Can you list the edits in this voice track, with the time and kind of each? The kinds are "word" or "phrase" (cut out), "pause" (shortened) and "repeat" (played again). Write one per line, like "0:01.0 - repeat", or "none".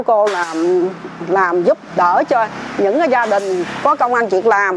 none